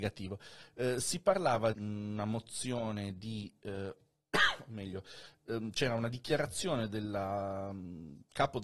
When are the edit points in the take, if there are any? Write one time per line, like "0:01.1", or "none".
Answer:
0:01.7